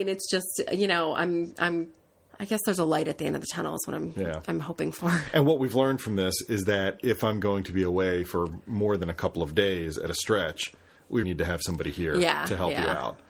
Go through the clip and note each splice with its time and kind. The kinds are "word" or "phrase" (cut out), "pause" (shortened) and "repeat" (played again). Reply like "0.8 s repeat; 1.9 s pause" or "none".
2.1 s pause; 11.2 s word